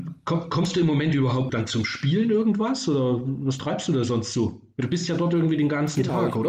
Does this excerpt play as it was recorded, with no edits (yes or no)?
no